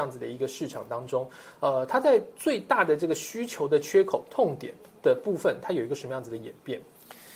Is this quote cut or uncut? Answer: uncut